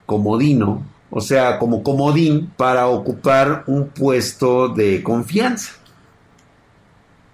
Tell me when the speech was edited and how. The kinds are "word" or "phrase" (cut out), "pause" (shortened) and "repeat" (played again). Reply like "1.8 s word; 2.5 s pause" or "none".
1.0 s pause; 2.5 s pause